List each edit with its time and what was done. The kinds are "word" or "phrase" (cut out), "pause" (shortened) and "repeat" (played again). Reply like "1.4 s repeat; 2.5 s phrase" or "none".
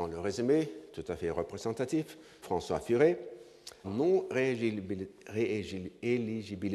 2.4 s word; 3.8 s word